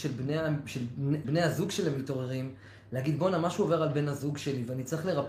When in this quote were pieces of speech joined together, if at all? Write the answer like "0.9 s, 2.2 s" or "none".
1.2 s